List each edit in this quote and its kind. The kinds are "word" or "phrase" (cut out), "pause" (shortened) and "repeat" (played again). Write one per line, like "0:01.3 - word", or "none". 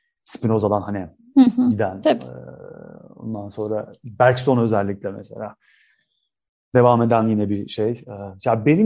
none